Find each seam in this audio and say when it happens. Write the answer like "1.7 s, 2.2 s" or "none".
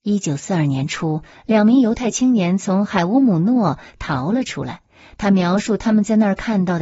none